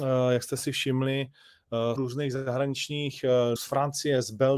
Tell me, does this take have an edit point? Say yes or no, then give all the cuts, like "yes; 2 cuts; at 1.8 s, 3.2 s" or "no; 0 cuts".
yes; 2 cuts; at 2.0 s, 3.6 s